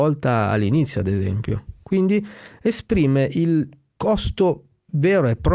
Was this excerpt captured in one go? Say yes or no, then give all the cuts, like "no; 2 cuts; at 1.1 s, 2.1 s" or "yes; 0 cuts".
yes; 0 cuts